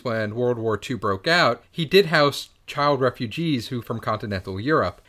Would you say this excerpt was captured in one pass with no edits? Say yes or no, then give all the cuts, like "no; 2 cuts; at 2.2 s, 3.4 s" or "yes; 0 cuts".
no; 1 cut; at 3.8 s